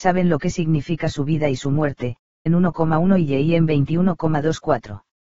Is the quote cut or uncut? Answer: cut